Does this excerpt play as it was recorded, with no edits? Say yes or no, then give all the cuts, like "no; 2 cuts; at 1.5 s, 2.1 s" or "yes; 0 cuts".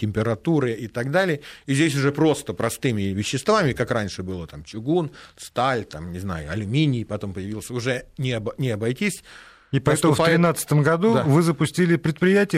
yes; 0 cuts